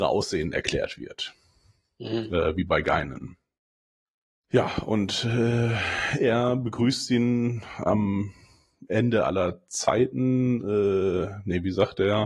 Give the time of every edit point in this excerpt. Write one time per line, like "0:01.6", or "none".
none